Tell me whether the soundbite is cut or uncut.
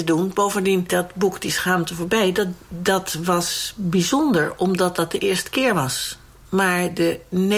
uncut